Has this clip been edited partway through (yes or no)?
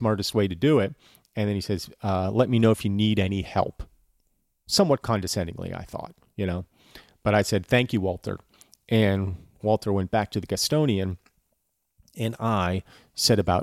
no